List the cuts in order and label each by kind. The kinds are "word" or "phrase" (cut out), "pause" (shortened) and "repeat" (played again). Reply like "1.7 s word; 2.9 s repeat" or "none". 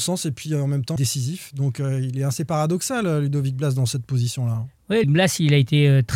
1.0 s phrase; 5.0 s word